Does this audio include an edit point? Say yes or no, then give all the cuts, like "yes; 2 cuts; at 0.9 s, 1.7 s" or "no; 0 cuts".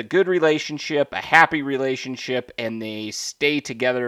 no; 0 cuts